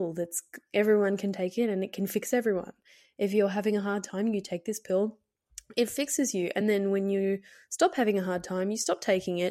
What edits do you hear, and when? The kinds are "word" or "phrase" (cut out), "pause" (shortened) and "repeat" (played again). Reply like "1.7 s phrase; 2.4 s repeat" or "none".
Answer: none